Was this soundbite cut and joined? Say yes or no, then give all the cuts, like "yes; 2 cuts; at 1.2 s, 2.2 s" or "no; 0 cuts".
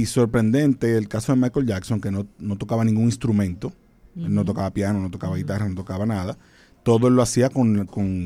no; 0 cuts